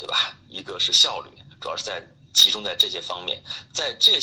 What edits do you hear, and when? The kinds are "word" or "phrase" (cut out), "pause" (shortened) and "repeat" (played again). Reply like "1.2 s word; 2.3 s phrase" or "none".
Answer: none